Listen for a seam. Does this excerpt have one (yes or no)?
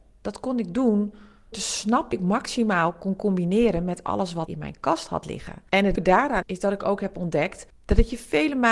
yes